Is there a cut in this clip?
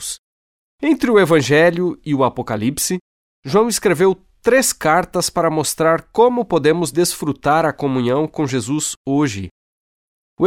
no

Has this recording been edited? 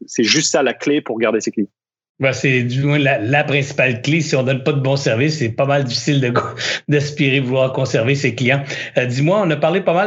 no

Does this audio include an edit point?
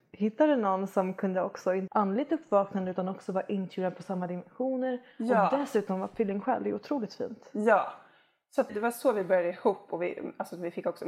yes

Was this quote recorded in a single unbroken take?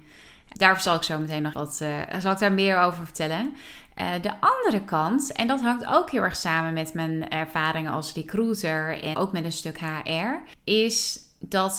no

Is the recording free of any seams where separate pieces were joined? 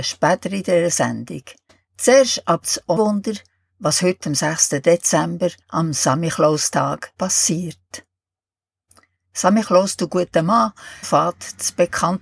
no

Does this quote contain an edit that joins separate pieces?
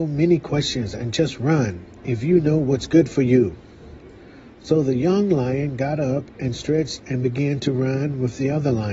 no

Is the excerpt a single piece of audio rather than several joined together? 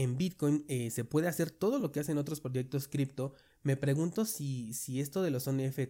yes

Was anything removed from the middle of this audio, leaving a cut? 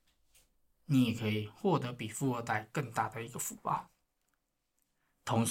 no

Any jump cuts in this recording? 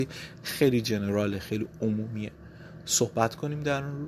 no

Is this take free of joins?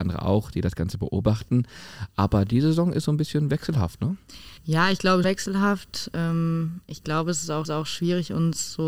no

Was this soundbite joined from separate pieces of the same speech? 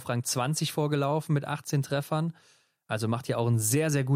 no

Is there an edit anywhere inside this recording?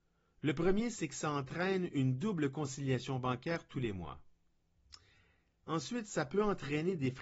no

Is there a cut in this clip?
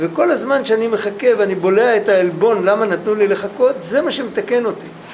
no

